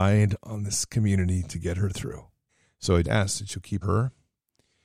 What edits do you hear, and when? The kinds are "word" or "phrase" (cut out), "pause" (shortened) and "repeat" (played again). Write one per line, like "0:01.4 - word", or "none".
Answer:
0:02.5 - pause
0:03.0 - word
0:03.8 - phrase